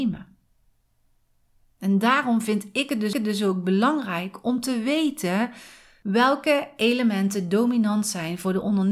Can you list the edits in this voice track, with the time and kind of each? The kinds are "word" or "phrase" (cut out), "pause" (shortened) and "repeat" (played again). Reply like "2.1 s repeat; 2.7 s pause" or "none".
3.1 s repeat